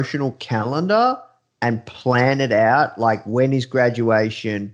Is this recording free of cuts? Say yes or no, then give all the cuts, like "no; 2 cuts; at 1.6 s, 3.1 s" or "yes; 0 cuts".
yes; 0 cuts